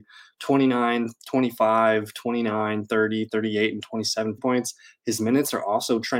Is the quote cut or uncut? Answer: cut